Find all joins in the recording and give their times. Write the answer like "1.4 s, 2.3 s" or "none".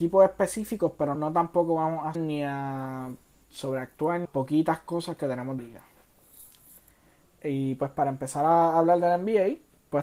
1.1 s, 2.1 s, 4.2 s, 5.6 s